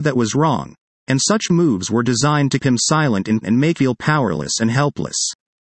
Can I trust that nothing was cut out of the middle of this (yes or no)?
no